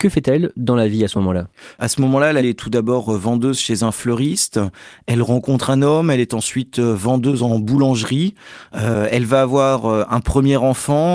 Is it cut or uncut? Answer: uncut